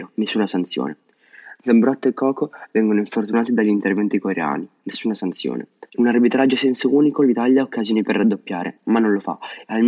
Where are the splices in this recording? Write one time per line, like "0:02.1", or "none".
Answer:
0:05.9